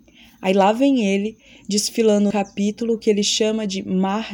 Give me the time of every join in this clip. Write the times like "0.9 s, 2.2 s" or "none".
2.3 s